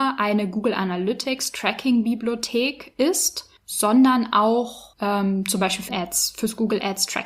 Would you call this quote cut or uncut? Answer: cut